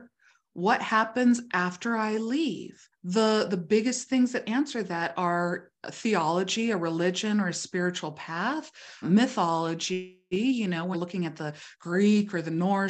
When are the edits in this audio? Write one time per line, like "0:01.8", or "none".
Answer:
0:02.9
0:09.0
0:10.9